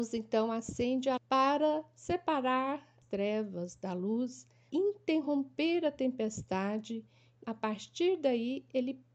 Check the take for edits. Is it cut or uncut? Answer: cut